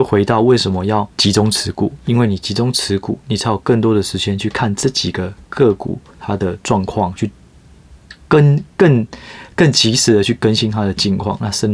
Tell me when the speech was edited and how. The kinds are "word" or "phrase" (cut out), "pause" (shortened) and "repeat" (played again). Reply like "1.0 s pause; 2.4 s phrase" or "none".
1.1 s pause; 6.1 s pause